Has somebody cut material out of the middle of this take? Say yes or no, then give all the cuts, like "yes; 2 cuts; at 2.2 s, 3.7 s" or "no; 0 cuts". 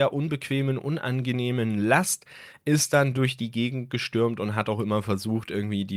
no; 0 cuts